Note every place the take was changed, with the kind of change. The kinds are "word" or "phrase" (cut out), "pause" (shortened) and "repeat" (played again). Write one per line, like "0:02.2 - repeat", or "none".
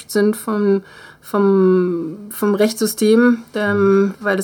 none